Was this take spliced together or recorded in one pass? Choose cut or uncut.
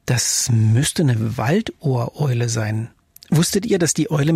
uncut